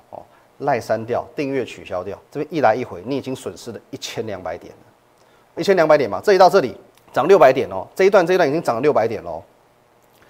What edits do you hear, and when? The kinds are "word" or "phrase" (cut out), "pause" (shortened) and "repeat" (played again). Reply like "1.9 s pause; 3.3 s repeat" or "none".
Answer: 2.2 s pause; 5.6 s phrase; 6.9 s pause